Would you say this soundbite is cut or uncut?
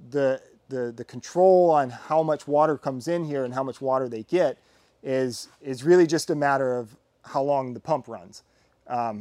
uncut